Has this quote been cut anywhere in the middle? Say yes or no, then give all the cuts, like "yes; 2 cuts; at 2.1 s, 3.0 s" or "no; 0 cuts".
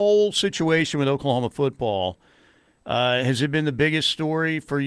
no; 0 cuts